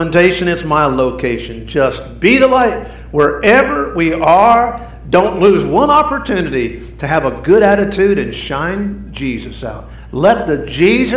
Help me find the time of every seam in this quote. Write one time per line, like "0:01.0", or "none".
none